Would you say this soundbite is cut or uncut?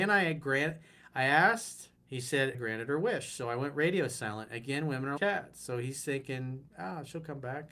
cut